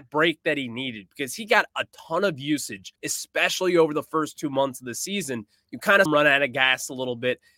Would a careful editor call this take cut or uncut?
cut